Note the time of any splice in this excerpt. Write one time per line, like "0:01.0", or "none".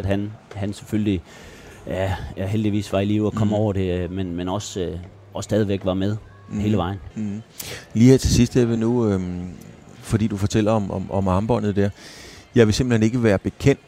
none